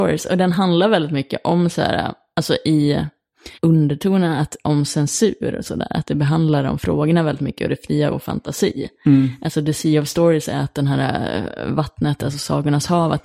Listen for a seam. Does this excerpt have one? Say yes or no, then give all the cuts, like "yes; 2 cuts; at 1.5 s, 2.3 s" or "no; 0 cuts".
yes; 2 cuts; at 3.5 s, 8.1 s